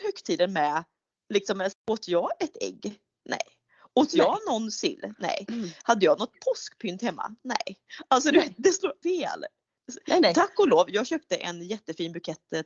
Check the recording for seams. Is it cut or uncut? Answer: cut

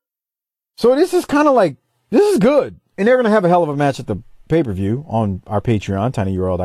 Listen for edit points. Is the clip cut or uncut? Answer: uncut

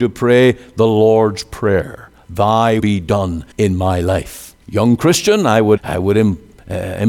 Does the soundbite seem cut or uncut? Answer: cut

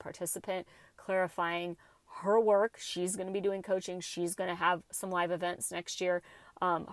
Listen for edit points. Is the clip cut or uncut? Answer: uncut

